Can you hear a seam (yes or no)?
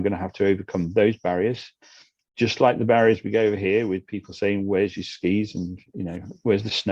no